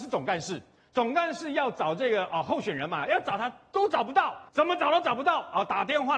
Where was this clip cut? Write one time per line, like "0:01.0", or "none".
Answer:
0:04.5